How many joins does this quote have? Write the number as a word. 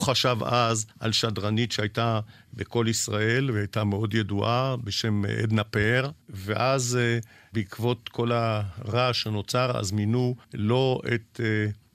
three